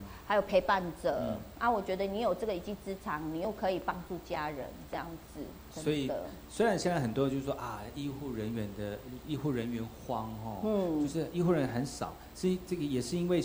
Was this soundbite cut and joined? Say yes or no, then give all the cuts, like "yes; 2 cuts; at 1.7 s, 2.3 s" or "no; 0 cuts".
no; 0 cuts